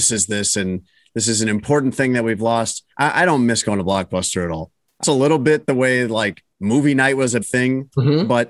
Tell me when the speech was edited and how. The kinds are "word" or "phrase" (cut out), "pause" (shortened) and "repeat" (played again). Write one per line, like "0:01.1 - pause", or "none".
0:02.9 - pause
0:05.0 - word
0:06.5 - pause
0:07.4 - word